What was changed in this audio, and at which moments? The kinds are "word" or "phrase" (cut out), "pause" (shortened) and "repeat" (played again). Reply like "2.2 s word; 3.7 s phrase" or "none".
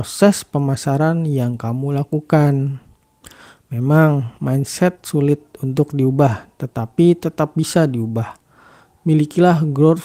none